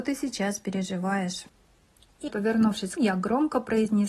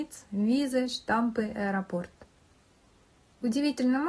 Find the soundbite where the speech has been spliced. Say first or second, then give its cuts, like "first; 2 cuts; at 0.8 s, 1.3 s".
first; 2 cuts; at 2.3 s, 3.0 s